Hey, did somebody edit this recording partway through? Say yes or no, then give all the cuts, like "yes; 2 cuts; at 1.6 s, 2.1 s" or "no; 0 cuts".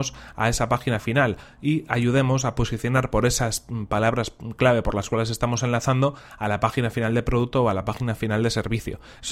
no; 0 cuts